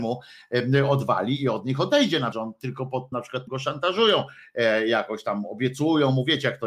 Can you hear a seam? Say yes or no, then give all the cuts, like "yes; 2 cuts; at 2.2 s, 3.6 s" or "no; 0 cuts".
yes; 3 cuts; at 2.3 s, 3.1 s, 3.5 s